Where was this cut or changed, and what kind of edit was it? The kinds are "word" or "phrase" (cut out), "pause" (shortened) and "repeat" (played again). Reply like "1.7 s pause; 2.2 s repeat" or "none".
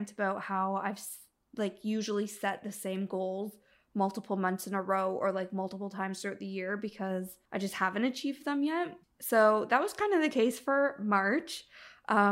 7.4 s pause; 9.0 s pause